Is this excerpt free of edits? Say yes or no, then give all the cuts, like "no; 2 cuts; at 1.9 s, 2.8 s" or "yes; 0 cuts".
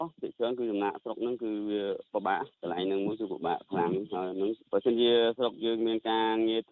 no; 2 cuts; at 2.5 s, 4.6 s